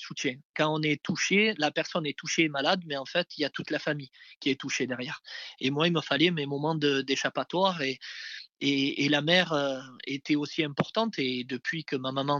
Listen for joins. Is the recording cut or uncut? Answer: uncut